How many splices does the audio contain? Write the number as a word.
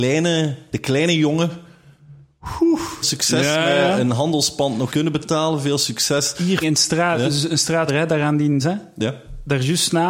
five